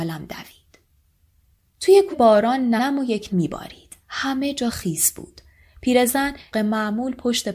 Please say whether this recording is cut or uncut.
cut